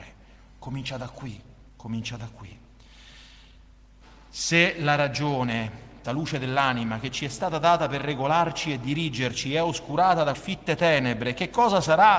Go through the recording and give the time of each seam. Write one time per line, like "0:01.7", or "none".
0:01.7
0:06.0
0:10.3